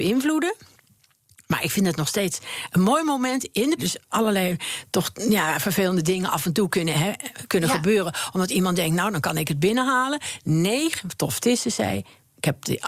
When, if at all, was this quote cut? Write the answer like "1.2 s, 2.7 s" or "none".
3.8 s, 6.9 s